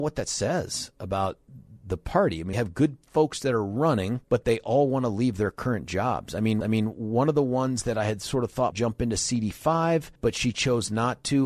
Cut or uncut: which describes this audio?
cut